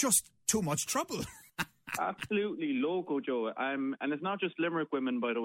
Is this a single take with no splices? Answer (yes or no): no